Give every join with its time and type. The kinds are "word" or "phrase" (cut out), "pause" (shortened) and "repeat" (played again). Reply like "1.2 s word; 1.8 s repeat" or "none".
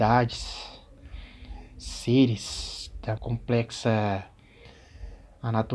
3.2 s word